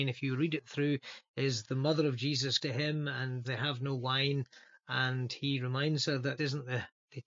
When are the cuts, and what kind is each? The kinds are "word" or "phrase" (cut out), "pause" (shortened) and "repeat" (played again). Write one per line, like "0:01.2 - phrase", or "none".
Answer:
0:02.6 - word
0:03.4 - word
0:06.4 - word

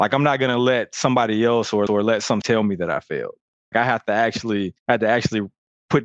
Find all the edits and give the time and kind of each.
0:01.9 - repeat
0:02.4 - word
0:03.7 - word
0:04.8 - pause

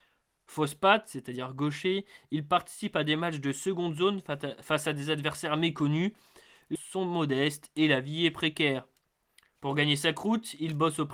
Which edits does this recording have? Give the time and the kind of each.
0:06.8 - word

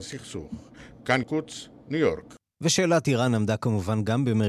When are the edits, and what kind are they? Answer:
0:01.2 - word

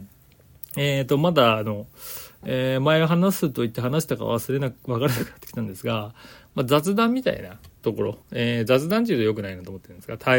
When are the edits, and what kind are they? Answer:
0:07.8 - pause
0:08.2 - pause

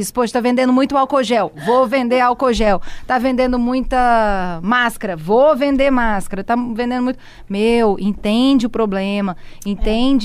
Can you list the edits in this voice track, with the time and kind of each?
none

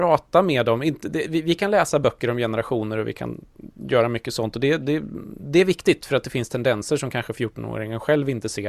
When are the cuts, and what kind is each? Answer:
none

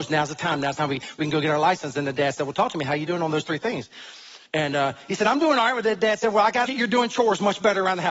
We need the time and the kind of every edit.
0:04.5 - pause
0:06.7 - phrase

